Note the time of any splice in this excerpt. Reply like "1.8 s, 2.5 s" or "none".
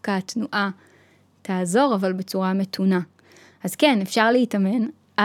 none